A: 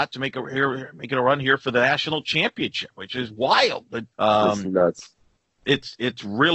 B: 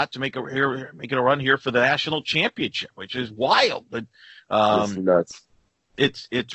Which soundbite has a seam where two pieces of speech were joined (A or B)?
A